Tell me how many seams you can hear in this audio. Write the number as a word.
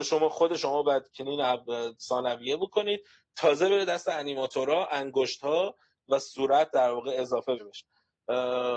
one